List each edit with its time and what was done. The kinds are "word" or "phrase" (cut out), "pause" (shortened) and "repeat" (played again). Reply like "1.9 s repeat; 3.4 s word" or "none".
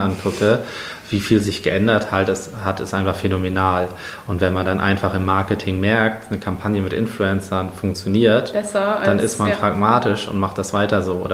none